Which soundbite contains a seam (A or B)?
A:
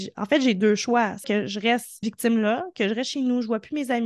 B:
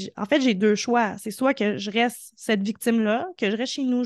A